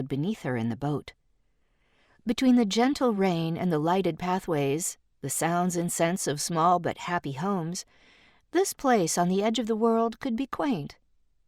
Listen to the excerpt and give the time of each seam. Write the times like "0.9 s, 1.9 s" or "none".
none